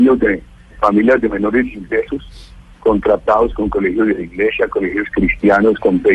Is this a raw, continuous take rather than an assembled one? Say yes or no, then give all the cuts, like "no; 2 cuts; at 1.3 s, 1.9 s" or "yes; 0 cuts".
yes; 0 cuts